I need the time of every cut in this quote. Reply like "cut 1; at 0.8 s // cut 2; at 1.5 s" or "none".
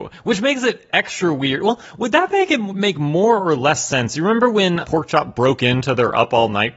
cut 1; at 4.8 s